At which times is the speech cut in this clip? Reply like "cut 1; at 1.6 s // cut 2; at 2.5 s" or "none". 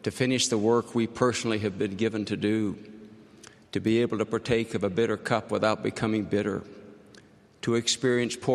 none